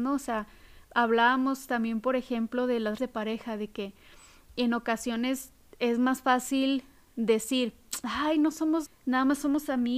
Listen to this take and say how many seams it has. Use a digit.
2